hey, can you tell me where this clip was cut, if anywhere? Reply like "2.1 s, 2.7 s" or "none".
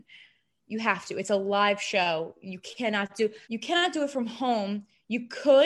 3.4 s